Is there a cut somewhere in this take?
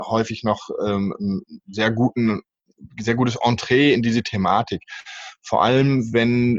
no; 0 cuts

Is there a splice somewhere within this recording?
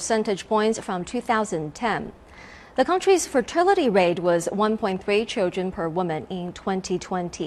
no; 0 cuts

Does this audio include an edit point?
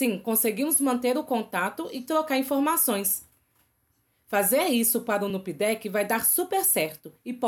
no; 0 cuts

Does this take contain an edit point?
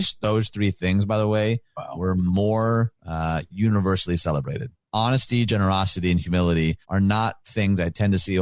yes; 2 cuts; at 3.0 s, 6.8 s

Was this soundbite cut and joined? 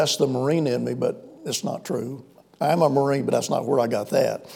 no; 0 cuts

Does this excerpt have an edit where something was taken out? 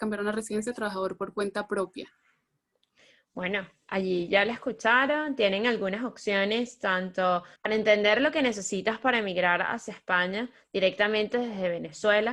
yes; 1 cut; at 7.6 s

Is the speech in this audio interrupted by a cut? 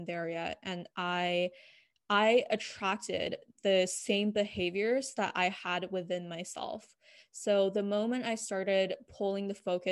no; 0 cuts

